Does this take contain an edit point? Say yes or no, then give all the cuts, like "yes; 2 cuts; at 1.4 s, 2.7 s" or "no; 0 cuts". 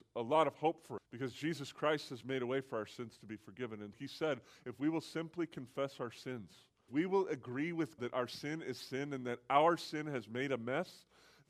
yes; 4 cuts; at 1.0 s, 3.9 s, 6.9 s, 8.0 s